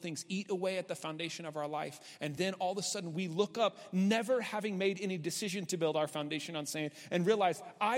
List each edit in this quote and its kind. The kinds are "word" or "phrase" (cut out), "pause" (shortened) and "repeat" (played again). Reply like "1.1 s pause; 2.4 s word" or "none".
none